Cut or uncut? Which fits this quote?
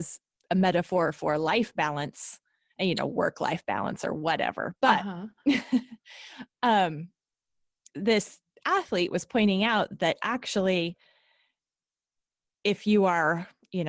uncut